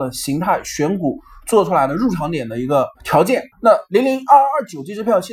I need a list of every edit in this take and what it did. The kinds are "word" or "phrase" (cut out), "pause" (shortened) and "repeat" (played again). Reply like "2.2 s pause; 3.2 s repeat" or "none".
3.0 s pause; 3.5 s pause